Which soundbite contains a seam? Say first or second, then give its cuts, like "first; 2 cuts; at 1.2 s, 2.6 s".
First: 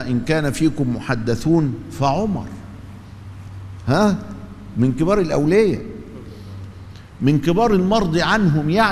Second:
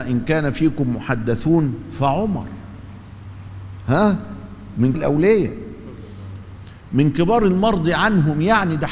second; 1 cut; at 4.9 s